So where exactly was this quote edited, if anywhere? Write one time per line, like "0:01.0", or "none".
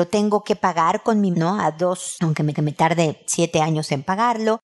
0:01.3
0:02.2
0:02.5